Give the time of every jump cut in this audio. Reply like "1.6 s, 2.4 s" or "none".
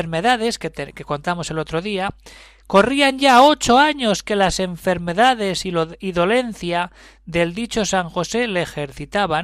none